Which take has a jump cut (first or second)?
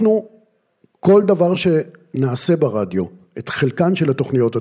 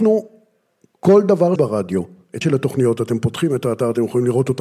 second